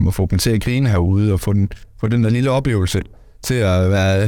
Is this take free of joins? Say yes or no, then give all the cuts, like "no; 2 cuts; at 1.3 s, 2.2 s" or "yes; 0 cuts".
yes; 0 cuts